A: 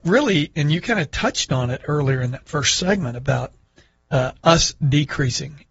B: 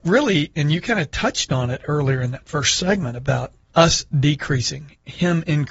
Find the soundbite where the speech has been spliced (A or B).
B